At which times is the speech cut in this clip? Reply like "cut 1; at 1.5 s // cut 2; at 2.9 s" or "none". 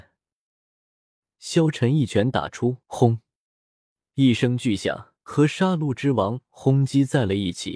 cut 1; at 2.8 s // cut 2; at 5.2 s

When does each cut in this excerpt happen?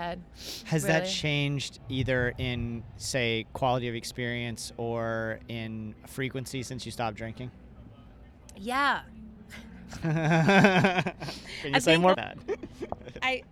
cut 1; at 1.8 s // cut 2; at 12.1 s

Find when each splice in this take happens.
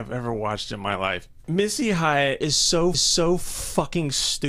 cut 1; at 2.9 s

